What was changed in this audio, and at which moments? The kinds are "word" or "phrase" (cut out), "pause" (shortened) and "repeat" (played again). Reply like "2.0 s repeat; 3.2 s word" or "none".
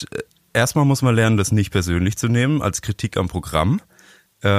none